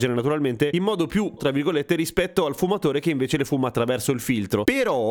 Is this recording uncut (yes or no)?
no